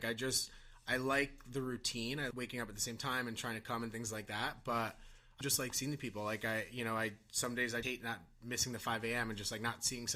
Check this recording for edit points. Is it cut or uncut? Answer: cut